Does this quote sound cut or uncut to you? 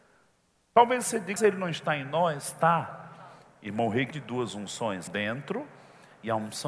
cut